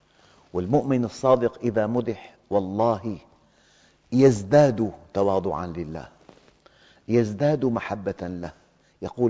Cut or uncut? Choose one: uncut